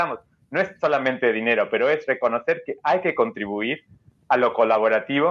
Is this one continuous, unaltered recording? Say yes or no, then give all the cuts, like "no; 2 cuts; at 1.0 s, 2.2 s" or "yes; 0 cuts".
yes; 0 cuts